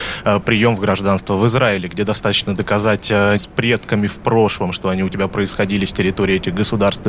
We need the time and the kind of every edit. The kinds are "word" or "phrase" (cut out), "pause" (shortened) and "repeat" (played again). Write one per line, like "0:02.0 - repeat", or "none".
0:03.4 - phrase